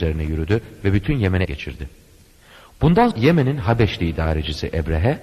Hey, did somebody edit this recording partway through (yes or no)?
yes